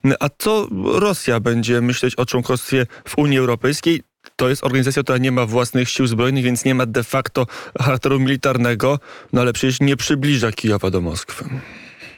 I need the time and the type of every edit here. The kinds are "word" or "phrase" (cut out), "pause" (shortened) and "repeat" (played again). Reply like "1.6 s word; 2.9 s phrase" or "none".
none